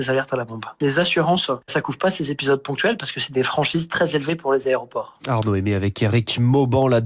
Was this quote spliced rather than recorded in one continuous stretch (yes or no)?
no